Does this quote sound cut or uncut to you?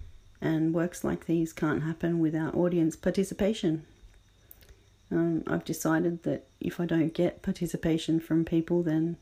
uncut